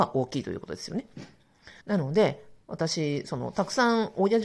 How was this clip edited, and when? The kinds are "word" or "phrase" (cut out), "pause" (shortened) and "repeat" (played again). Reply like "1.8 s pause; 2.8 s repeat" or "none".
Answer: 1.8 s pause; 2.6 s pause